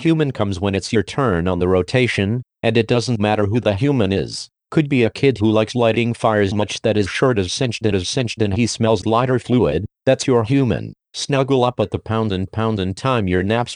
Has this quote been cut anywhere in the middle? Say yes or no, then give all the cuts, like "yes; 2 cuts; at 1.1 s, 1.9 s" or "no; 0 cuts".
yes; 4 cuts; at 6.5 s, 7.9 s, 9.0 s, 12.5 s